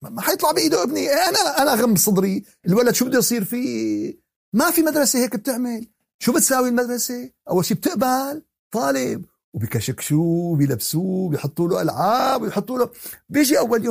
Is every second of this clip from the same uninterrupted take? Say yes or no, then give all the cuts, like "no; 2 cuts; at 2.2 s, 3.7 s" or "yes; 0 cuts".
yes; 0 cuts